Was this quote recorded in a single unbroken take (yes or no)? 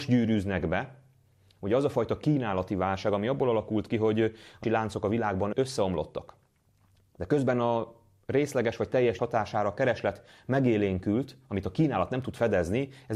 no